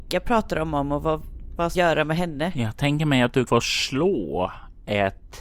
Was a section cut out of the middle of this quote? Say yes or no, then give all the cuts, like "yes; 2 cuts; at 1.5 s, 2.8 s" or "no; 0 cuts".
yes; 2 cuts; at 1.7 s, 3.5 s